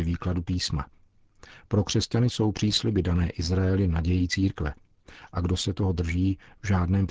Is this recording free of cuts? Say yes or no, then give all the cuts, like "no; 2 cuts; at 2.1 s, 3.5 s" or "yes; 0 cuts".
yes; 0 cuts